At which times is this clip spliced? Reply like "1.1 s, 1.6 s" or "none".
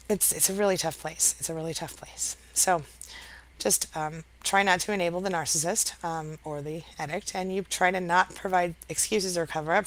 none